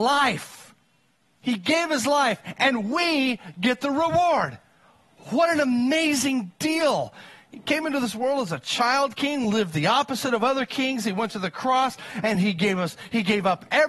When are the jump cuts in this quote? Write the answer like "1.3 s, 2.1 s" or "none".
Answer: none